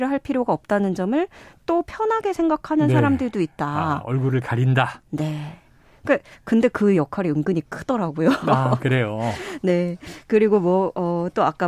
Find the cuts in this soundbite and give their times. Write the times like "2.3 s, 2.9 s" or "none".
none